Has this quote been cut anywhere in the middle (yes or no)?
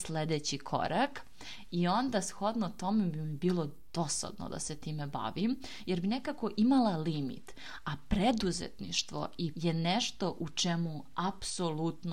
yes